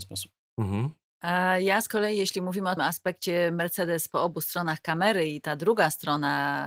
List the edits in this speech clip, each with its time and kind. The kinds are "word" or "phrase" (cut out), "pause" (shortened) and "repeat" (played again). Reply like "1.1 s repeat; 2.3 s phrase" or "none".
2.8 s word